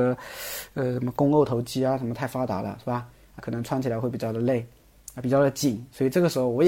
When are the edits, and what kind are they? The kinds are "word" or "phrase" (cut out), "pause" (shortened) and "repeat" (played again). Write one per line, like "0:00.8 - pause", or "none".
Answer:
0:03.4 - word